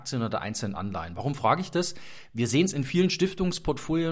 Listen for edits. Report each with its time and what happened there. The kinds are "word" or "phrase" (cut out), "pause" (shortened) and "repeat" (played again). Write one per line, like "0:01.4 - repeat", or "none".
none